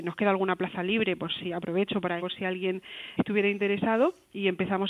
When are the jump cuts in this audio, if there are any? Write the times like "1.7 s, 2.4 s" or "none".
2.2 s, 3.2 s

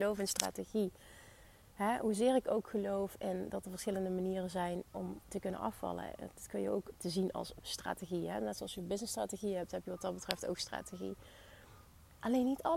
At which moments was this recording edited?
none

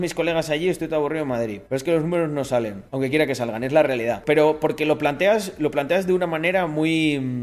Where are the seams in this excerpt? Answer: 1.7 s, 2.9 s

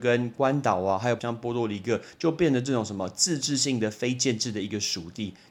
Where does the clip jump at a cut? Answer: 1.2 s

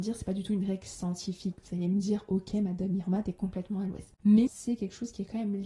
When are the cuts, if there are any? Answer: 4.5 s

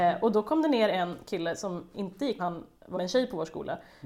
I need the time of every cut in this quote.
2.4 s, 2.9 s

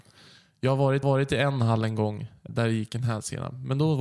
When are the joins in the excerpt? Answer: 1.0 s, 2.5 s

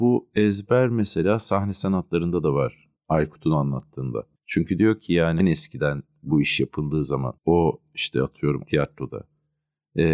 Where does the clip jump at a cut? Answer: 3.0 s, 4.4 s, 5.4 s, 7.4 s, 8.7 s

